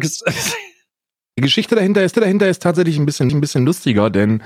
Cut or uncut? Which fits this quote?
cut